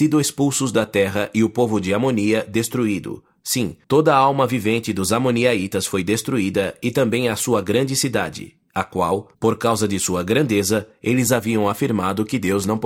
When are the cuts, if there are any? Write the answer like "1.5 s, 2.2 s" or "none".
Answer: 3.8 s, 9.3 s